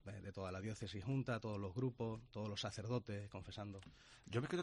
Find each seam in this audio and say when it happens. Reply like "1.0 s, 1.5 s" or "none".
none